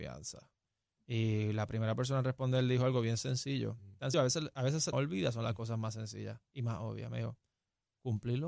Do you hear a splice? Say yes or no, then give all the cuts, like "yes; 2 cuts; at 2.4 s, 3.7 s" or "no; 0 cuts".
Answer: yes; 2 cuts; at 4.1 s, 4.9 s